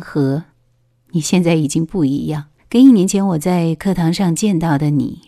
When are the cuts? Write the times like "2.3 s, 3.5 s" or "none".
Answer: 2.6 s